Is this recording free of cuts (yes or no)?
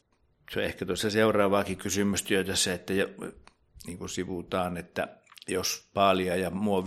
yes